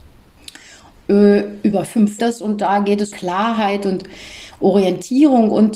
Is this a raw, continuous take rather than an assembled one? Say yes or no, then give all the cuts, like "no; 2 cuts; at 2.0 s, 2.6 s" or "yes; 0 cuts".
no; 2 cuts; at 2.2 s, 3.1 s